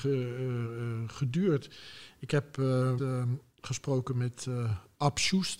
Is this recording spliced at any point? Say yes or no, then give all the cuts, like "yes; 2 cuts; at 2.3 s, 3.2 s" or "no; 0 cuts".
yes; 1 cut; at 3.0 s